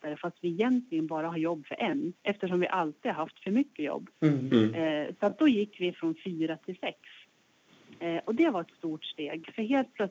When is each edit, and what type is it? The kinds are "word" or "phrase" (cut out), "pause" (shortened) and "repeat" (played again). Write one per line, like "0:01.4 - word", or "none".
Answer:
0:02.2 - pause
0:04.2 - pause
0:05.9 - word

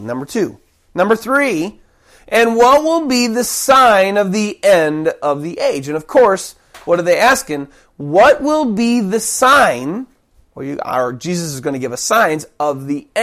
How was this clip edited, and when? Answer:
none

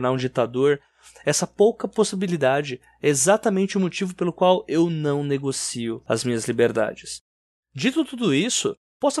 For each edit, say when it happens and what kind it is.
none

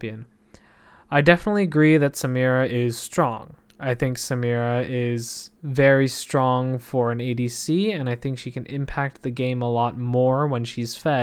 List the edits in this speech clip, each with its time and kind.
0:05.6 - pause

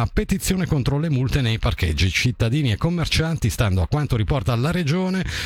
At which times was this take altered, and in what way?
none

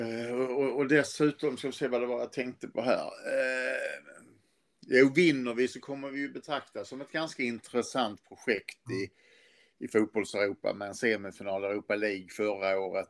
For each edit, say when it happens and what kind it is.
none

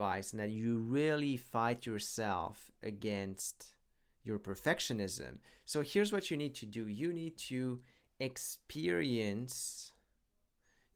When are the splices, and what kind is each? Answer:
none

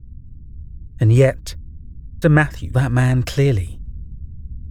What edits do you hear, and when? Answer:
0:02.2 - word
0:02.7 - word

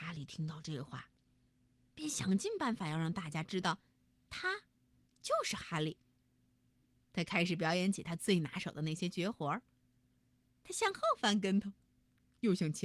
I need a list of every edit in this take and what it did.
none

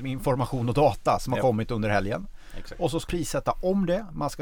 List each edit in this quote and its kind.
0:03.1 - word

